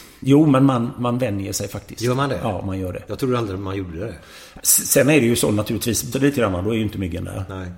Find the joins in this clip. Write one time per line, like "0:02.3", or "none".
0:06.1